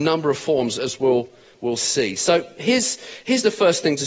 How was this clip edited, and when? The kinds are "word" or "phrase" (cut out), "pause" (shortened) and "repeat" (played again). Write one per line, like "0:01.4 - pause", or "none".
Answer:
none